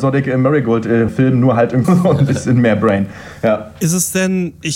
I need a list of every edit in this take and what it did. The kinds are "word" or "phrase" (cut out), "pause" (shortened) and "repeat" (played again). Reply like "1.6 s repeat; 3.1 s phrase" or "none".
1.1 s word; 1.8 s word